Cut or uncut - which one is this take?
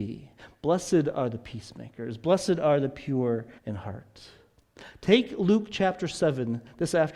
cut